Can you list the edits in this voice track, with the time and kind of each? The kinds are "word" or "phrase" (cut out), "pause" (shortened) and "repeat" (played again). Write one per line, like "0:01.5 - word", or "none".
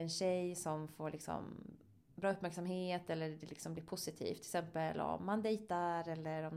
none